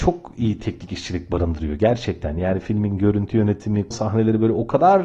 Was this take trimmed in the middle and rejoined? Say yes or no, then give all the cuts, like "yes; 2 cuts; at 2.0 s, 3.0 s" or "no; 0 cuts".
yes; 1 cut; at 3.9 s